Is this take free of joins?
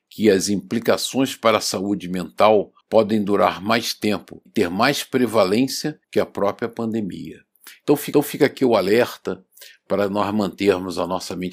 no; 4 cuts; at 2.8 s, 4.5 s, 6.0 s, 8.1 s

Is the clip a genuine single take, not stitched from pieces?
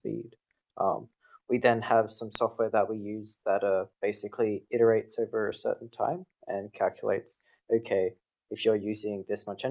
yes; 0 cuts

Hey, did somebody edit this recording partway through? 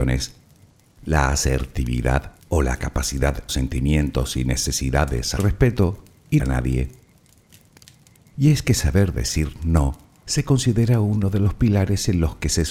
yes; 4 cuts; at 2.4 s, 3.5 s, 5.4 s, 6.4 s

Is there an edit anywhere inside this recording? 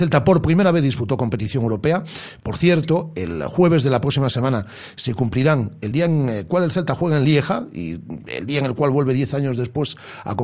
no; 0 cuts

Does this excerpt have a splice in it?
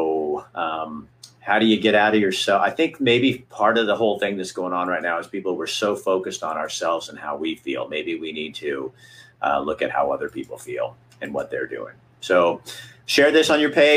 no; 0 cuts

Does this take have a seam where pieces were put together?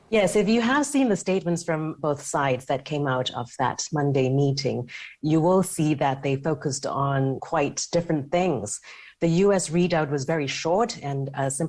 yes; 2 cuts; at 2.0 s, 7.4 s

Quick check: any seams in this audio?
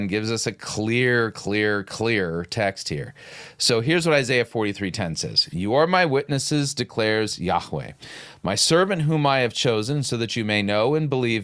no; 0 cuts

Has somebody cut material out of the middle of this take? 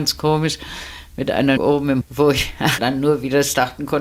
yes; 3 cuts; at 1.6 s, 2.0 s, 2.8 s

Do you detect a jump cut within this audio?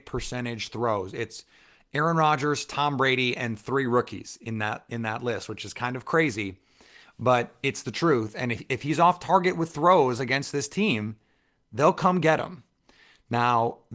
no; 0 cuts

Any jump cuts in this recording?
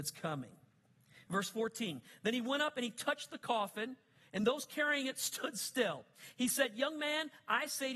no; 0 cuts

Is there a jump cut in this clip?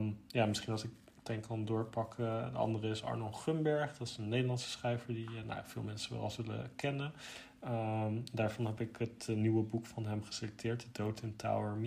no; 0 cuts

